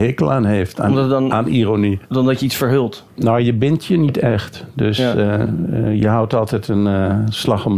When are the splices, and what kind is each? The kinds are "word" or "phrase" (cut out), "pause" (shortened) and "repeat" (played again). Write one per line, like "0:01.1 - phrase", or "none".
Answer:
none